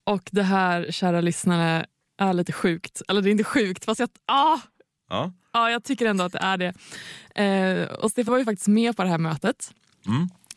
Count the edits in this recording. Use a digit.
1